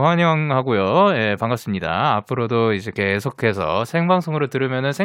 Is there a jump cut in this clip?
no; 0 cuts

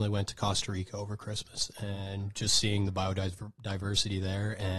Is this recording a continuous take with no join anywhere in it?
yes; 0 cuts

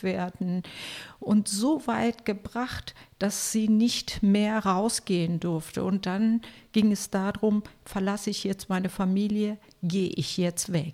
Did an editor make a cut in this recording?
no; 0 cuts

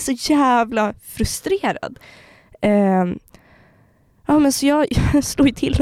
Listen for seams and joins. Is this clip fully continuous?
yes; 0 cuts

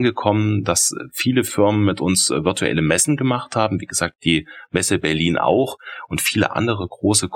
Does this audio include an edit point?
no; 0 cuts

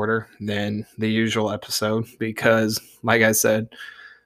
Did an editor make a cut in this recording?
no; 0 cuts

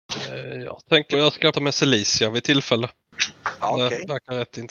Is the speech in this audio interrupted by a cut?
yes; 2 cuts; at 1.1 s, 1.5 s

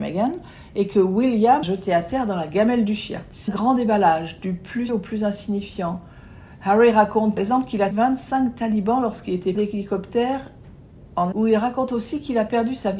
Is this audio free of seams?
no; 7 cuts; at 1.6 s, 3.5 s, 4.9 s, 7.4 s, 7.9 s, 9.5 s, 11.3 s

